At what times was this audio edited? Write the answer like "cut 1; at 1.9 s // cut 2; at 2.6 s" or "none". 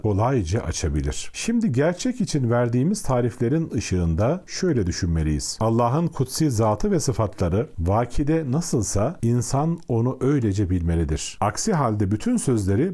none